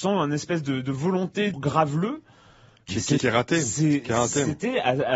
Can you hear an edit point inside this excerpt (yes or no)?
yes